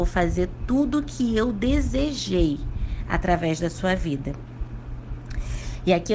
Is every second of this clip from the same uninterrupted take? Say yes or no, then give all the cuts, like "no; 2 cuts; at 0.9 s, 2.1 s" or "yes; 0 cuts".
yes; 0 cuts